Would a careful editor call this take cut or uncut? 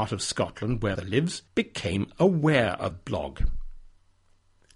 cut